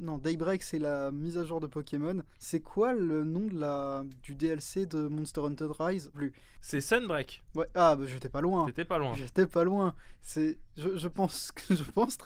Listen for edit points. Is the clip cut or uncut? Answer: cut